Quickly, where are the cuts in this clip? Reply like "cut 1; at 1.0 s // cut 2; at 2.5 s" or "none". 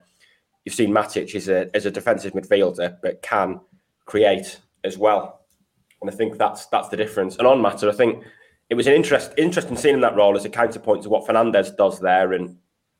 none